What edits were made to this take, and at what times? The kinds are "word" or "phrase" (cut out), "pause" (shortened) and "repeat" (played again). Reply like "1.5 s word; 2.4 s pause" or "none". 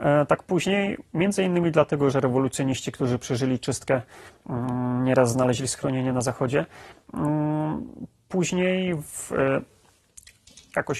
2.1 s word